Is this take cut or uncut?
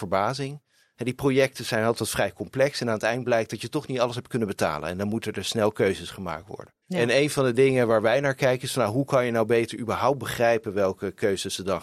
cut